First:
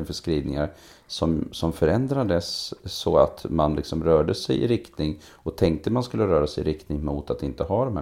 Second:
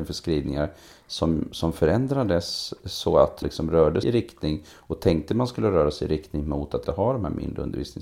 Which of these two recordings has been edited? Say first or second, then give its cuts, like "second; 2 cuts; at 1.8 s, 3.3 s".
second; 3 cuts; at 3.4 s, 4.0 s, 6.8 s